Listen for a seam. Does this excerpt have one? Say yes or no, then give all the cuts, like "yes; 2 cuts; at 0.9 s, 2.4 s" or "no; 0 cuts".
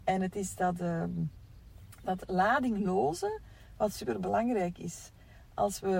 no; 0 cuts